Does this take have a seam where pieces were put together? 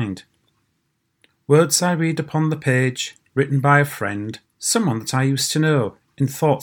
yes; 1 cut; at 4.4 s

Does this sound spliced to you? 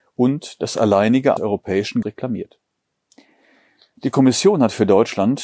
yes; 2 cuts; at 1.4 s, 2.0 s

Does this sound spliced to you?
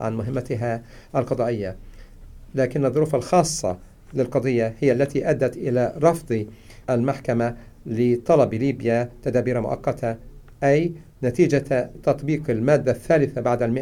yes; 2 cuts; at 6.8 s, 12.0 s

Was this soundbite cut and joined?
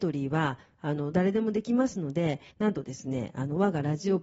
yes; 1 cut; at 2.5 s

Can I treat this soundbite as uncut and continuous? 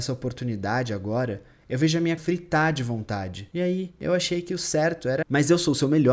no; 2 cuts; at 2.2 s, 5.2 s

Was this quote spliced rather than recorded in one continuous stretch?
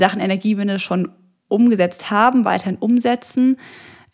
no; 0 cuts

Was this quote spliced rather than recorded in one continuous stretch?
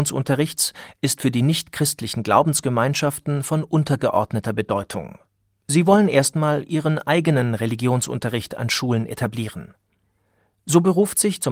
no; 0 cuts

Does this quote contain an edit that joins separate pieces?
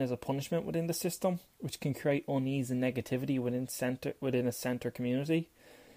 no; 0 cuts

